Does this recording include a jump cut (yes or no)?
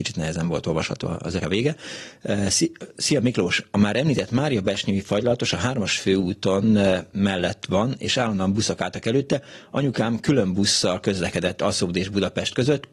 yes